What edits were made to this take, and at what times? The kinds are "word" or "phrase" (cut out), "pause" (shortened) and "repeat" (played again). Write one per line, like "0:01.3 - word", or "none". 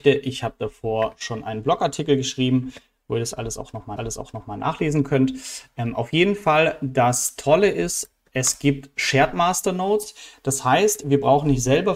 0:04.0 - repeat